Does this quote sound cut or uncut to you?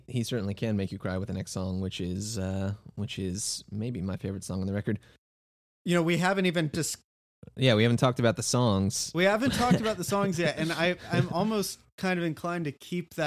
uncut